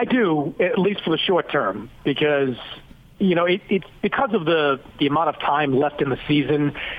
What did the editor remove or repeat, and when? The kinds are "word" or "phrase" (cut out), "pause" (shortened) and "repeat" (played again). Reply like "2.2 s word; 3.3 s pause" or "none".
none